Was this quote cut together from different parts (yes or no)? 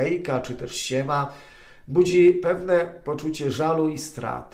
no